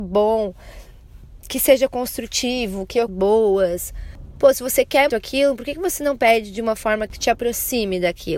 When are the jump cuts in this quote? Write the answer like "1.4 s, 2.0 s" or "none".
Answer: 3.1 s, 5.1 s